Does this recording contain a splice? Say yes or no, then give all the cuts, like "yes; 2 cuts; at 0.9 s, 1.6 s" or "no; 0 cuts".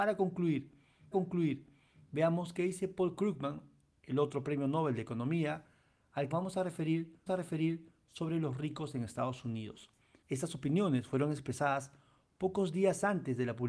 yes; 3 cuts; at 1.1 s, 6.3 s, 7.3 s